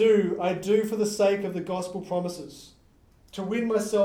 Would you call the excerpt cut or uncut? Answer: uncut